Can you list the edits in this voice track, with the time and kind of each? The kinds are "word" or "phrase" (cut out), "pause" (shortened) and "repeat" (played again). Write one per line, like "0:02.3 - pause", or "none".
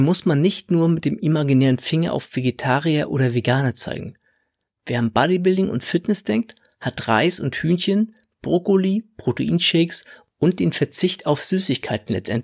none